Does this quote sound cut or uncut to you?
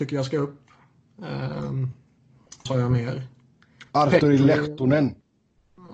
cut